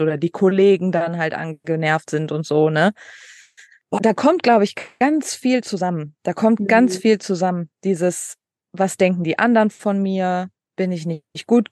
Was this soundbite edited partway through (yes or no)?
yes